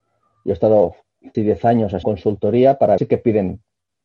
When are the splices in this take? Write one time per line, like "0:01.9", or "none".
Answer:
0:01.3
0:02.0
0:03.0